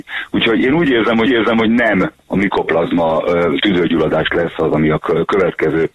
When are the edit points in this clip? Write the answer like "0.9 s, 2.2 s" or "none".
1.3 s